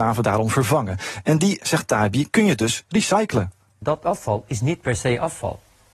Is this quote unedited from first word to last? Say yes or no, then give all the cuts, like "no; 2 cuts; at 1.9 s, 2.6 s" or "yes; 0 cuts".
yes; 0 cuts